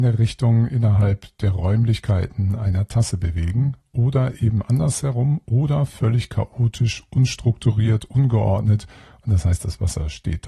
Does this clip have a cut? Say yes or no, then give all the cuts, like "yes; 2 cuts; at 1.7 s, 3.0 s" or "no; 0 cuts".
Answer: no; 0 cuts